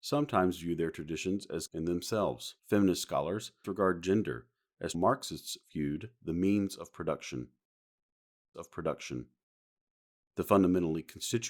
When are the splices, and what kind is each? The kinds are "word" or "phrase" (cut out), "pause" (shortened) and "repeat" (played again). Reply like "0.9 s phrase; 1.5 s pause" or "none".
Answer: 1.7 s word; 2.6 s pause; 3.6 s word; 4.9 s word; 8.5 s repeat